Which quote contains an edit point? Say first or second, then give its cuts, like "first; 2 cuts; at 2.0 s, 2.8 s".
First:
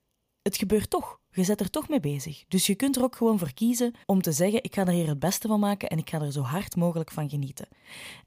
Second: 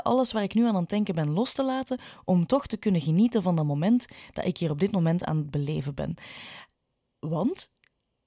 first; 1 cut; at 4.0 s